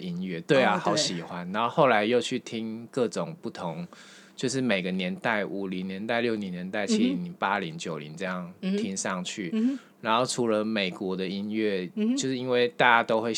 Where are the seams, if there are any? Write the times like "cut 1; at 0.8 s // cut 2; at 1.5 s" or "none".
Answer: none